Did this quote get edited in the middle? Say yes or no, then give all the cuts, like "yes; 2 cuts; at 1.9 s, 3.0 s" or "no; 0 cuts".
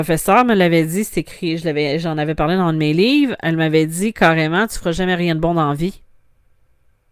no; 0 cuts